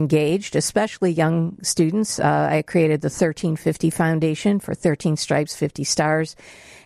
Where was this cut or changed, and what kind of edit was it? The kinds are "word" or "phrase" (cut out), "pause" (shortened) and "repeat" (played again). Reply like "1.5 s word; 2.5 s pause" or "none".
none